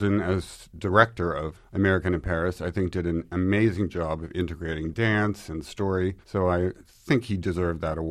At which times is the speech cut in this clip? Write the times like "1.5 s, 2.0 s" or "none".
1.5 s, 5.6 s, 6.2 s

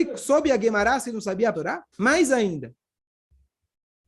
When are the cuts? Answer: 1.0 s, 1.5 s, 1.9 s

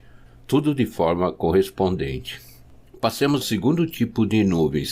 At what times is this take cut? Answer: 3.4 s

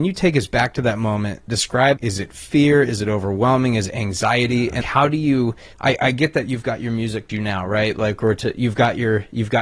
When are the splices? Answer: 2.0 s, 4.8 s, 5.7 s, 7.3 s

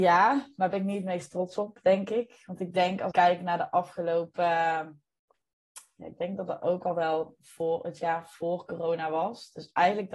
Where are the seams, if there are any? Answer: 3.1 s

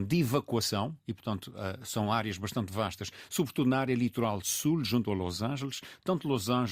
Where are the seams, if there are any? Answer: 1.0 s

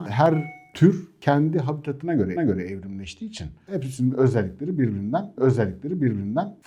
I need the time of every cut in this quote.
2.4 s, 5.4 s

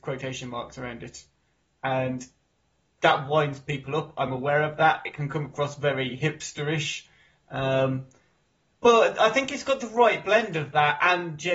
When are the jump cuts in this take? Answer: none

